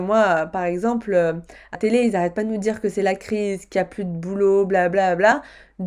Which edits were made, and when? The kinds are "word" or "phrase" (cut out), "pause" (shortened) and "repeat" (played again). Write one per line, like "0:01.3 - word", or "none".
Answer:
0:01.7 - word